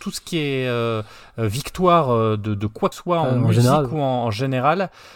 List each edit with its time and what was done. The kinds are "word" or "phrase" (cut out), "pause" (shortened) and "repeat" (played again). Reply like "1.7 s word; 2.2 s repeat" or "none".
2.9 s word